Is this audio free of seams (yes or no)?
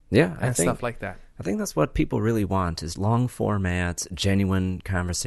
no